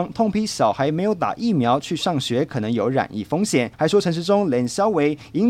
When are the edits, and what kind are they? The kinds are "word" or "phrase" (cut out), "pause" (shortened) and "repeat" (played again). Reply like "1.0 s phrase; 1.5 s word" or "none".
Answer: 3.7 s pause